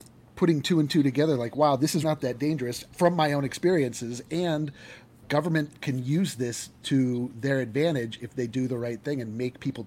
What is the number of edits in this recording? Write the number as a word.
three